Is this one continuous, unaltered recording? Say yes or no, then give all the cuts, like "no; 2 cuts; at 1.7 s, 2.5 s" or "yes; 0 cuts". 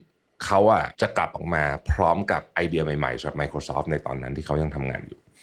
no; 1 cut; at 0.9 s